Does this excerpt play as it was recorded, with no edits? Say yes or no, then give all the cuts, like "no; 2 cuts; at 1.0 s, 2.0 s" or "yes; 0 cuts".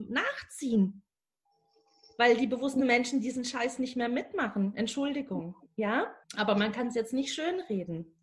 no; 1 cut; at 6.2 s